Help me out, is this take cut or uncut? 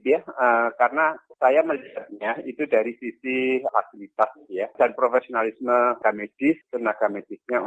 cut